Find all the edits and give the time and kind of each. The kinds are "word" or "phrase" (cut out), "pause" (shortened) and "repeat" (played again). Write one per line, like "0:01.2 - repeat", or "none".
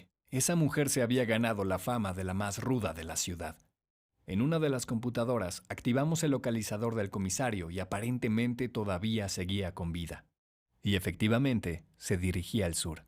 none